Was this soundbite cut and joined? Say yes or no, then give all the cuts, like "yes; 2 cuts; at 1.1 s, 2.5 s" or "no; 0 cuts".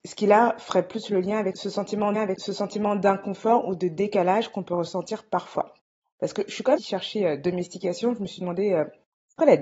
yes; 2 cuts; at 2.1 s, 6.8 s